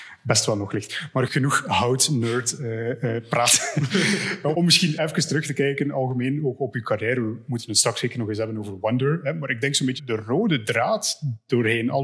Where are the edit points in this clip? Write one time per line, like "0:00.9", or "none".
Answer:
0:01.3
0:04.5
0:05.0
0:10.0